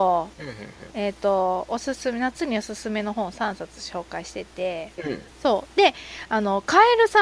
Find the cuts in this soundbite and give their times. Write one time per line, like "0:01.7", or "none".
0:05.0
0:05.3